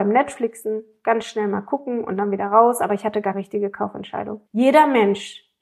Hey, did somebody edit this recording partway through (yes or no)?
yes